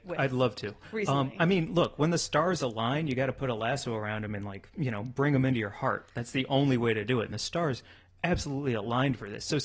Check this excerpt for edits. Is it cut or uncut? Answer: uncut